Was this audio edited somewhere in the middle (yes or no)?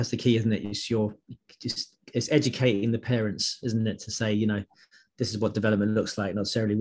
no